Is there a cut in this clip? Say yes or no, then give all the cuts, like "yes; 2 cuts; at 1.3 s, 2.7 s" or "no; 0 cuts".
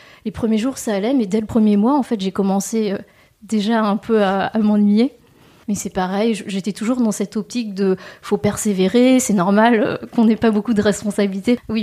no; 0 cuts